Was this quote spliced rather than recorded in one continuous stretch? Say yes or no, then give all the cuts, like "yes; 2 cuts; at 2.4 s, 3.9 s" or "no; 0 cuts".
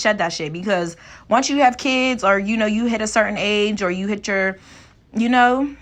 no; 0 cuts